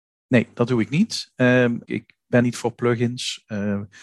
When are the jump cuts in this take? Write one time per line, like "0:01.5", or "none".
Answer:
0:01.8
0:02.4